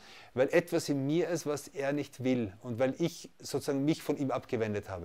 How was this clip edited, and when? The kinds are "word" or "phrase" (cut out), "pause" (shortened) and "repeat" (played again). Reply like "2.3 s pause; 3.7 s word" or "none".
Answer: none